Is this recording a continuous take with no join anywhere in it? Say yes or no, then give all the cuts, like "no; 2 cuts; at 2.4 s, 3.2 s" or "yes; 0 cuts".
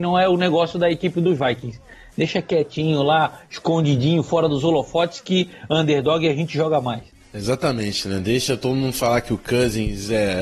yes; 0 cuts